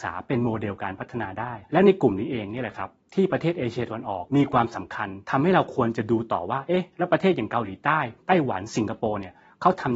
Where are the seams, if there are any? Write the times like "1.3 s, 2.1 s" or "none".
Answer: 8.2 s